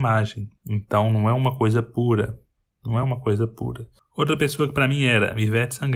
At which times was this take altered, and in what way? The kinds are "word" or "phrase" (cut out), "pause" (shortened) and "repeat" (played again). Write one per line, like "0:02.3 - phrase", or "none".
none